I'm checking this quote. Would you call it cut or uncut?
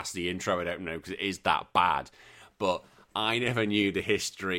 uncut